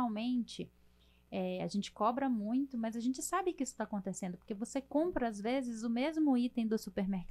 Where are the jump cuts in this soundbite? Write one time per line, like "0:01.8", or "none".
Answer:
none